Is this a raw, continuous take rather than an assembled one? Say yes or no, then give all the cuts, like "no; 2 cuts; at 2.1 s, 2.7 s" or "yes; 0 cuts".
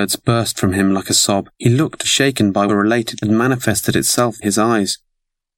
no; 5 cuts; at 1.5 s, 2.0 s, 2.7 s, 3.2 s, 4.4 s